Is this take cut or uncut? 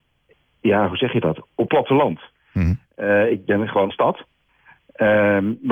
cut